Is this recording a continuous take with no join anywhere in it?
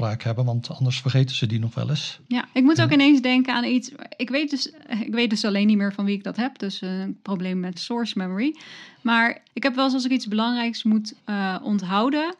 no; 4 cuts; at 2.5 s, 7.7 s, 9.5 s, 11.2 s

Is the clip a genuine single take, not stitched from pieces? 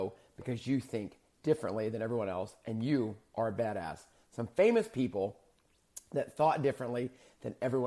yes; 0 cuts

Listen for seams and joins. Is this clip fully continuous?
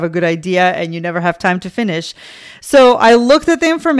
yes; 0 cuts

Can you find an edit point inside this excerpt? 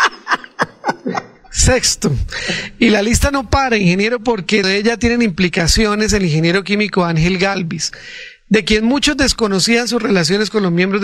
yes; 1 cut; at 4.6 s

